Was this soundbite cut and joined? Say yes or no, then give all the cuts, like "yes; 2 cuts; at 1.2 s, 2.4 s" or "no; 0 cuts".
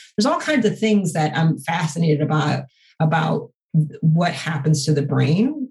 no; 0 cuts